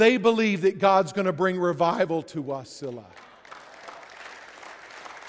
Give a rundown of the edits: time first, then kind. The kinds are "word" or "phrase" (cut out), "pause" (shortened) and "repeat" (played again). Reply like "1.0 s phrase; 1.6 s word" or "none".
none